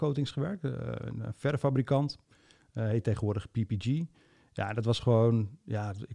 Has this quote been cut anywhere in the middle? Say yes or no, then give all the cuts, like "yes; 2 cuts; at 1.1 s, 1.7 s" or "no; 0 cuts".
no; 0 cuts